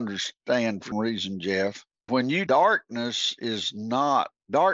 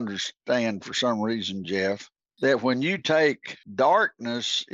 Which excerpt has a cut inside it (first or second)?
first